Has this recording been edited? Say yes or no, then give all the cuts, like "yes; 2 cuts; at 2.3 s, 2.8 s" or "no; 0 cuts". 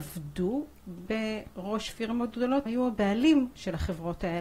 yes; 1 cut; at 2.7 s